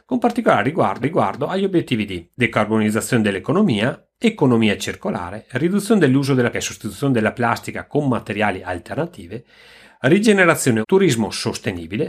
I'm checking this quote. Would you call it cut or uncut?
cut